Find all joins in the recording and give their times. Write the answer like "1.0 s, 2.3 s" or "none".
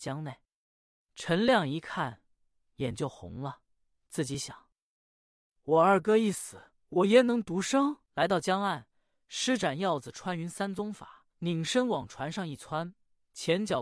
6.8 s, 8.0 s, 11.3 s